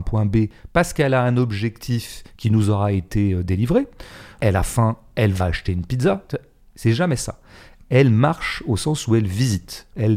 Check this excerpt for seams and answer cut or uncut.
uncut